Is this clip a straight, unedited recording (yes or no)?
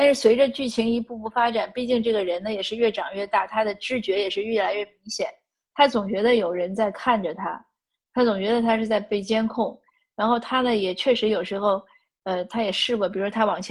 yes